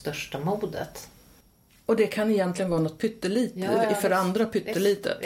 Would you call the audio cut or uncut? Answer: uncut